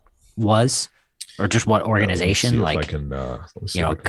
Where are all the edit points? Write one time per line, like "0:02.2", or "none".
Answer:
none